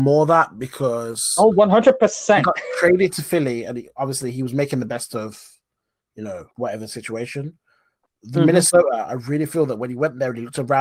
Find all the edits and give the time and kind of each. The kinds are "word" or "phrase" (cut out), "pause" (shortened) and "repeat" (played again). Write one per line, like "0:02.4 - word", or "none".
0:06.5 - pause